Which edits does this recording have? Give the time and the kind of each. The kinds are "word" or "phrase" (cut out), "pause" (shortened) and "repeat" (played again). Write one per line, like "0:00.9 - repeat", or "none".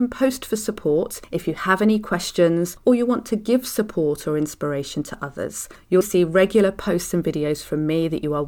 0:06.0 - word